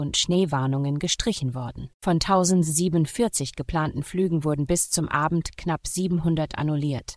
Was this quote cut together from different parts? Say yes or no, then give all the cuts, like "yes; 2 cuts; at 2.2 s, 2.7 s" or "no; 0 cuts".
yes; 1 cut; at 1.9 s